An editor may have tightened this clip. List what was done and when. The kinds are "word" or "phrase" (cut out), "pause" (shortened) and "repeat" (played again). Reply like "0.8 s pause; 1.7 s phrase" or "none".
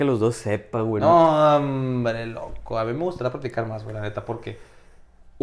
none